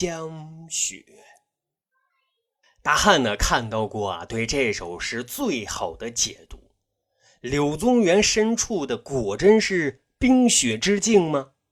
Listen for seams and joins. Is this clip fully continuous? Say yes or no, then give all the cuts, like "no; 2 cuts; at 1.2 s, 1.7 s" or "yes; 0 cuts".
yes; 0 cuts